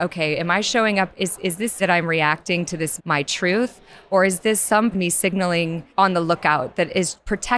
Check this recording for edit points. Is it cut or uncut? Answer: cut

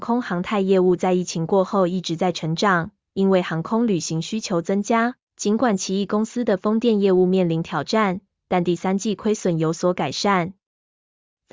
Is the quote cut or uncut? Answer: cut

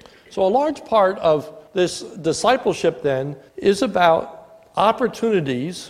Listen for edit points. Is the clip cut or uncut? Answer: cut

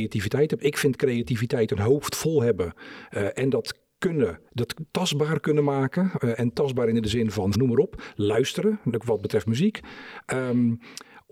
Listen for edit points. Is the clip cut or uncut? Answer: cut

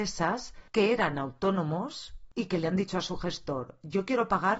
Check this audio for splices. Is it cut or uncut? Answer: uncut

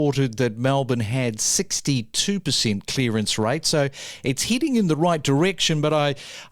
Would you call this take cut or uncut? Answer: uncut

